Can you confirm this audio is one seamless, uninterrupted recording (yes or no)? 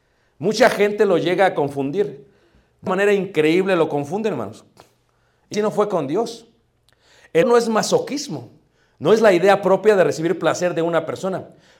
no